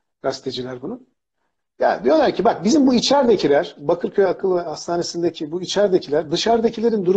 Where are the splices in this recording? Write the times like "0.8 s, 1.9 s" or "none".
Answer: none